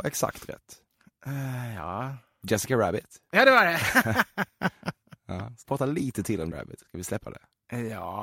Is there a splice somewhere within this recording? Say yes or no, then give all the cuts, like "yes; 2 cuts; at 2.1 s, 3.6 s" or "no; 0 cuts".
yes; 2 cuts; at 5.6 s, 6.5 s